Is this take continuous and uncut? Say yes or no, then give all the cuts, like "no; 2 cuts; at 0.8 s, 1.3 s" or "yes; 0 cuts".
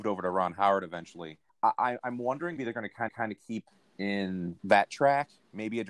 no; 4 cuts; at 1.5 s, 2.6 s, 3.1 s, 4.6 s